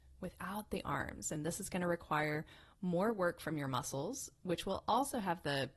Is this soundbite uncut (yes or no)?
yes